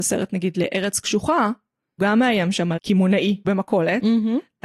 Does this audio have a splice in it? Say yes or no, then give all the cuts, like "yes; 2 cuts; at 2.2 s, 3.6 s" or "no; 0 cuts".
yes; 3 cuts; at 2.0 s, 2.8 s, 3.4 s